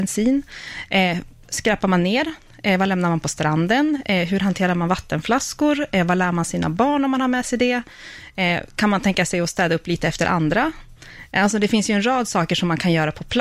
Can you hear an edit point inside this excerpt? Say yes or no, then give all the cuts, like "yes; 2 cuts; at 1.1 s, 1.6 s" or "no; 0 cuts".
no; 0 cuts